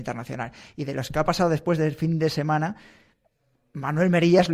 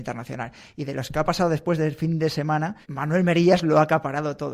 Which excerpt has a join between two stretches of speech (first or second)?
second